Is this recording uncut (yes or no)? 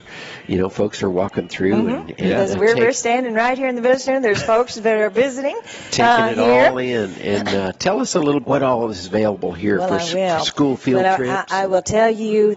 no